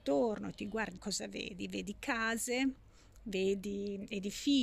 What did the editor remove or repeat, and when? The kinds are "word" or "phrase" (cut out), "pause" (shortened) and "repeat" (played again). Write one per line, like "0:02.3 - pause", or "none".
0:01.0 - word